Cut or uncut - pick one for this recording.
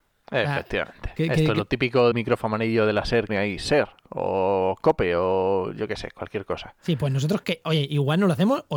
cut